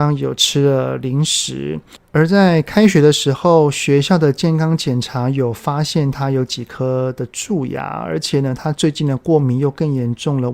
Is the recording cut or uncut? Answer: uncut